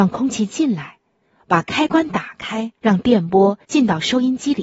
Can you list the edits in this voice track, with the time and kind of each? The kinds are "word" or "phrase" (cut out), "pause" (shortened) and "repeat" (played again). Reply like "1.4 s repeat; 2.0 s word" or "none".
1.2 s pause; 2.8 s pause; 3.6 s pause